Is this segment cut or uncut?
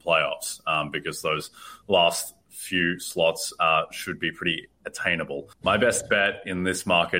cut